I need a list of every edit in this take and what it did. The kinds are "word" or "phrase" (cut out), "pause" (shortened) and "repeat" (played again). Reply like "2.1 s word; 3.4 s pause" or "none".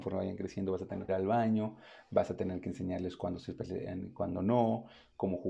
1.1 s phrase